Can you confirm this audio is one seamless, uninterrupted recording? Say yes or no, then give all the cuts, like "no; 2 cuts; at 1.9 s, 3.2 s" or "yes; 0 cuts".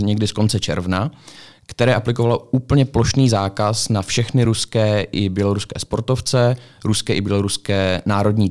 yes; 0 cuts